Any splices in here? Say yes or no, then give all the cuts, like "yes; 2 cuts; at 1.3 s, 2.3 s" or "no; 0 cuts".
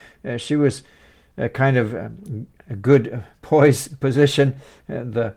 no; 0 cuts